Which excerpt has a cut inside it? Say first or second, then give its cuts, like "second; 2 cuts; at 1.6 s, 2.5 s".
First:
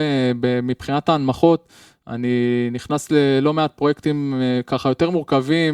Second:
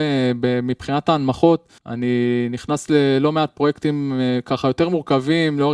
second; 1 cut; at 1.8 s